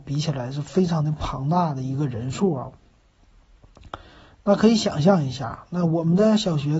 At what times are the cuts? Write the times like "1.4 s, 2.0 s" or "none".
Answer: none